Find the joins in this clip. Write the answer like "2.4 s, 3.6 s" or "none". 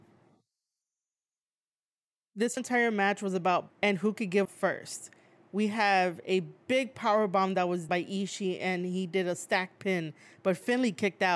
2.6 s, 3.7 s, 4.4 s, 7.9 s